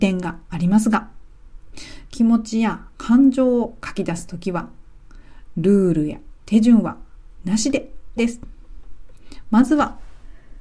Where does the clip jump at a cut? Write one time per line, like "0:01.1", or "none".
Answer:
0:08.2